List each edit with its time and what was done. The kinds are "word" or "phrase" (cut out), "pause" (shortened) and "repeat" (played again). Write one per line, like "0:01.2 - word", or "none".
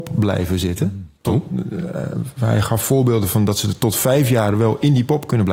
0:01.2 - pause